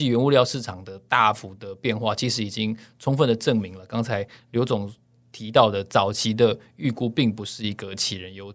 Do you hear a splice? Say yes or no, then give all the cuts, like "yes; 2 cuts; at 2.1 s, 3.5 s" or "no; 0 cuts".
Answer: no; 0 cuts